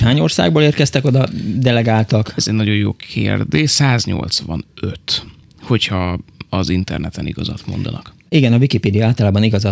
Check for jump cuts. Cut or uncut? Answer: uncut